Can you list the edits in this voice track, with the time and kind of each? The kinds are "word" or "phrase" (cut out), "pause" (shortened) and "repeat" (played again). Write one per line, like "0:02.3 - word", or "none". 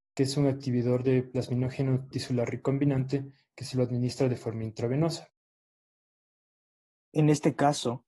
0:02.1 - word